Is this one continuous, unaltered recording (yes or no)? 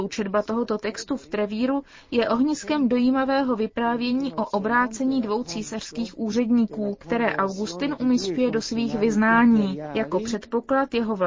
yes